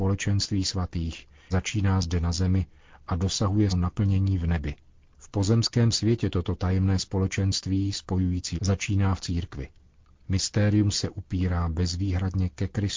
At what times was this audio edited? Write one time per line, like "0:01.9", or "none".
0:01.5
0:03.7
0:08.6
0:10.9